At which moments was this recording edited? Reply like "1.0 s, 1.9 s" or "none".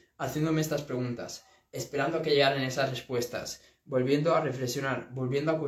none